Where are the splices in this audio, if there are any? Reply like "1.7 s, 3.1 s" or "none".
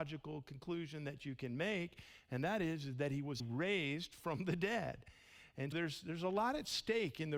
3.4 s, 5.7 s